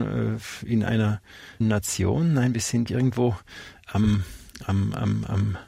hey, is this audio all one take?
no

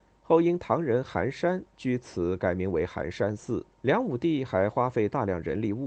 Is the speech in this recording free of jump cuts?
no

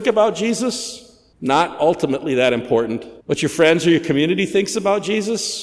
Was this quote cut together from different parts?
yes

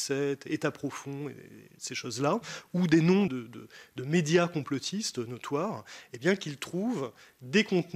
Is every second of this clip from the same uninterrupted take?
no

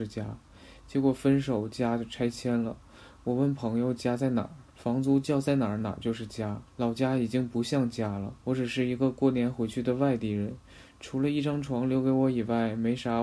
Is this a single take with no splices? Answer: no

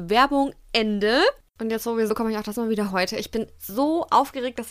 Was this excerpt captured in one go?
no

